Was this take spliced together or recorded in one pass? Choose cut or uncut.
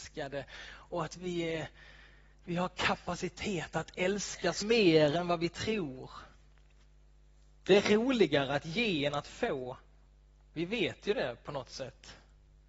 cut